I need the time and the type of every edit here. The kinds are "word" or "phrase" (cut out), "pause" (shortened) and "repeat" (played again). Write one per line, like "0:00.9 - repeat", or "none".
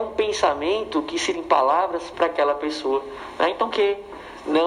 0:01.3 - word
0:02.1 - phrase
0:03.7 - word